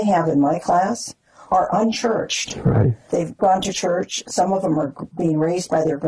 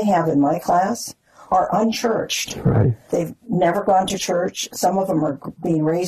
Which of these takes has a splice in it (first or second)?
first